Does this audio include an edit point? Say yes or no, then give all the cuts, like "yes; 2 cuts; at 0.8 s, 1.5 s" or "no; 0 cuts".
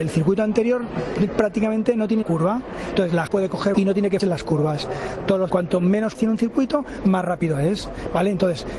yes; 7 cuts; at 1.3 s, 2.2 s, 3.3 s, 3.7 s, 4.2 s, 5.5 s, 6.1 s